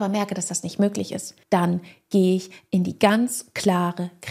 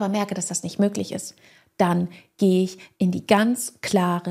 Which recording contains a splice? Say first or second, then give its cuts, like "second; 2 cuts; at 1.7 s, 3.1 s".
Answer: first; 1 cut; at 1.4 s